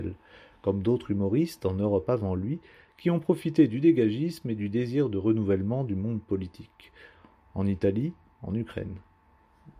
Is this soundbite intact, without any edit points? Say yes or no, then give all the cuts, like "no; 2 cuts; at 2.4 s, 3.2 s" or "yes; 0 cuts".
yes; 0 cuts